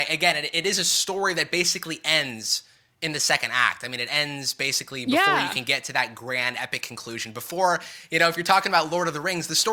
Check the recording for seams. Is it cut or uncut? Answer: uncut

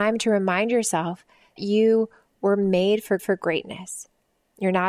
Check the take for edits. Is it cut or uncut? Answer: cut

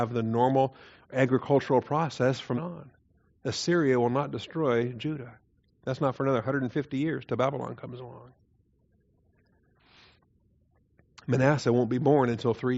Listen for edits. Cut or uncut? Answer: cut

